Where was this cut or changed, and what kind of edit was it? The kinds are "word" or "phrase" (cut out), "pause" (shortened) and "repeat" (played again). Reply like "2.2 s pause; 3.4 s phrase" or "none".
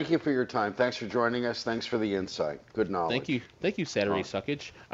3.5 s pause